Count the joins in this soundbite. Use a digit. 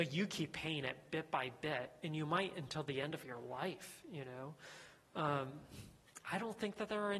0